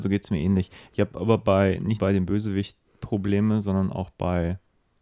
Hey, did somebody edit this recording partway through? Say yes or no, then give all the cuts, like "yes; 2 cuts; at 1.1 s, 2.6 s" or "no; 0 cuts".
yes; 1 cut; at 2.0 s